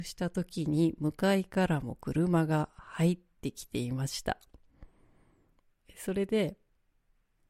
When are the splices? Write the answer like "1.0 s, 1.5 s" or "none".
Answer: none